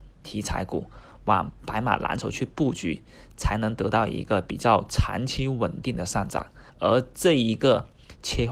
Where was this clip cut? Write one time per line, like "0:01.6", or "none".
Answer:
0:06.7